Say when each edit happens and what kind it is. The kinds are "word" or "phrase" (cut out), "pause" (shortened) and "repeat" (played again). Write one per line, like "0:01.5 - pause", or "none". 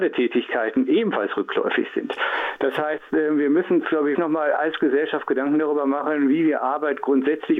0:04.1 - word